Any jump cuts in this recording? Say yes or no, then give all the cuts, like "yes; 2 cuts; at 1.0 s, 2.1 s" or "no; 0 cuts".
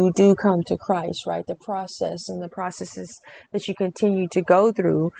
no; 0 cuts